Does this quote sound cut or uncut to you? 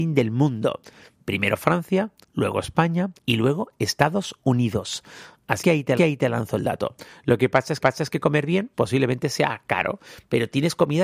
cut